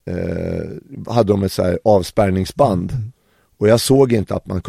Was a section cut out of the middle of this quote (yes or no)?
no